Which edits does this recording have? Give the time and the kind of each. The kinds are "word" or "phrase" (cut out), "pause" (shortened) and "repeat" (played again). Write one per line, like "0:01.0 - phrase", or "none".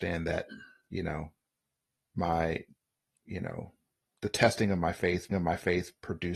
0:05.3 - repeat

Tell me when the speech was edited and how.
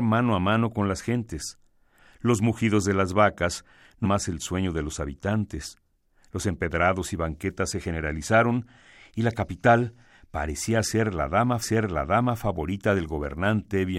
0:04.0 - word
0:11.6 - repeat

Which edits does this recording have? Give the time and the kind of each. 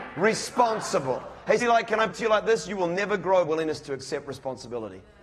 0:01.6 - word
0:02.1 - word
0:03.4 - phrase

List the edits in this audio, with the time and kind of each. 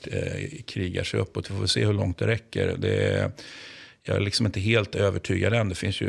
none

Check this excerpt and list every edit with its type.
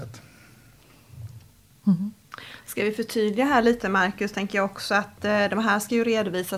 none

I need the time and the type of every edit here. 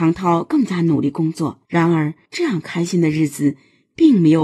0:01.6 - pause
0:02.3 - pause

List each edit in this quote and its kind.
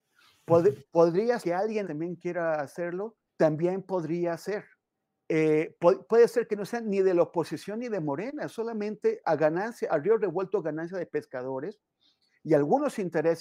0:01.4 - word
0:01.8 - phrase
0:03.3 - pause
0:04.9 - pause
0:06.0 - word
0:06.5 - phrase
0:09.2 - word
0:09.9 - word

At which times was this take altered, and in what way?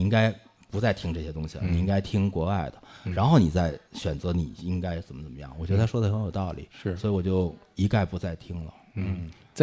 0:03.8 - pause

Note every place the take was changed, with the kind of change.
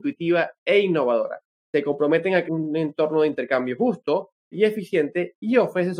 0:01.6 - pause
0:02.4 - word
0:04.5 - word

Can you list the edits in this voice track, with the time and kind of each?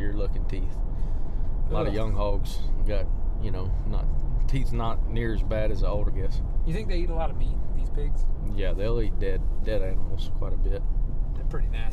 0:06.1 - phrase

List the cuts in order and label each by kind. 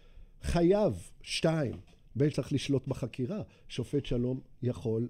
0:02.3 - phrase

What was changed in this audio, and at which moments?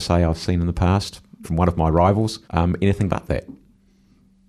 0:01.4 - word
0:02.4 - pause

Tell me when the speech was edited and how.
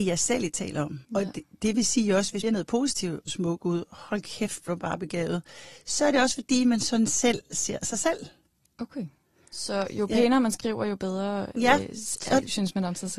0:01.0 - pause
0:02.4 - phrase
0:03.3 - phrase
0:04.7 - word

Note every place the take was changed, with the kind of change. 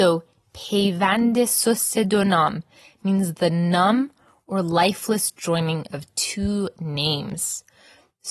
none

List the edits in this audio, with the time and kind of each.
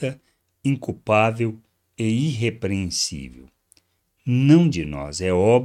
0:04.7 - word

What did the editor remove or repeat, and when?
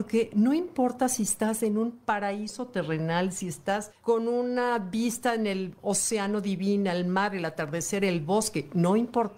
0:04.0 - pause

